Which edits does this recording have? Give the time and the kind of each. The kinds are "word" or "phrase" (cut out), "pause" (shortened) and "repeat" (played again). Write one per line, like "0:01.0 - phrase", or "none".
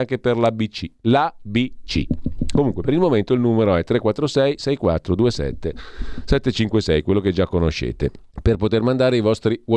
0:08.3 - pause